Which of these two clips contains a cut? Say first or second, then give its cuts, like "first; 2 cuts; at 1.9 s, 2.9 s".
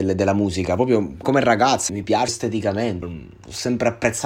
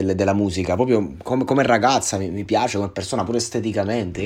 first; 4 cuts; at 1.2 s, 1.9 s, 2.3 s, 3.0 s